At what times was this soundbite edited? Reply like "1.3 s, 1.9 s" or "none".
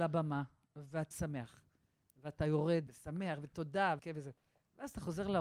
1.1 s, 2.9 s, 4.0 s

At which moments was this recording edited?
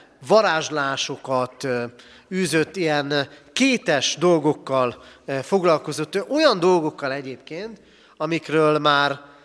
none

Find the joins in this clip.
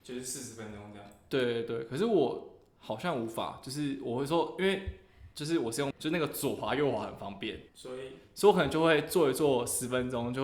5.9 s, 7.7 s

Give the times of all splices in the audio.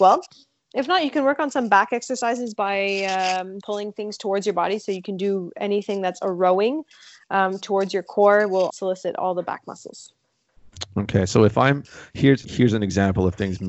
3.6 s, 8.7 s, 12.4 s

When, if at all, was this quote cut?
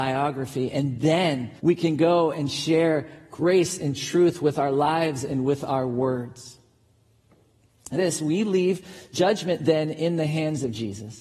1.6 s, 8.0 s

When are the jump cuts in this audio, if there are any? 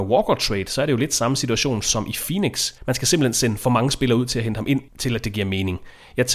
2.8 s, 4.9 s

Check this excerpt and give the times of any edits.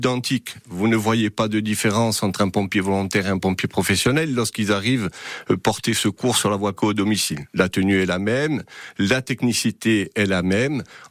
6.8 s

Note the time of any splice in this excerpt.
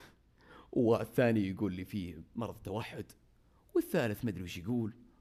none

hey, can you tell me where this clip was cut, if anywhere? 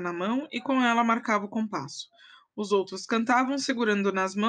none

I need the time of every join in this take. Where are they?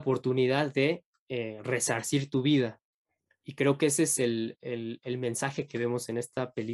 none

